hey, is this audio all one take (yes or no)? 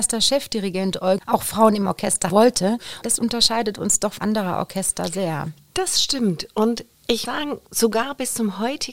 no